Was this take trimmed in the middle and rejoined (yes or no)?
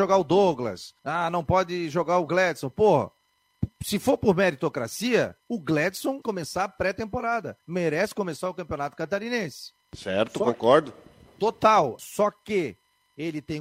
yes